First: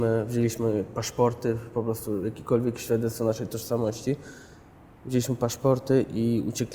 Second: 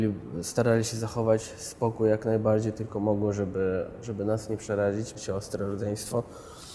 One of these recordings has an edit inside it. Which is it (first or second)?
second